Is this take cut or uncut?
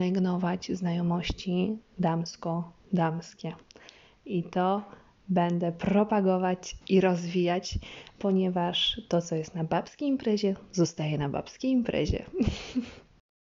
uncut